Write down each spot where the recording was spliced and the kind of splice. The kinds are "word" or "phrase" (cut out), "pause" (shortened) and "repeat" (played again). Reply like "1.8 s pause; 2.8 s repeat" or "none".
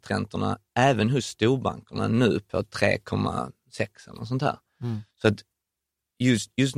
5.1 s pause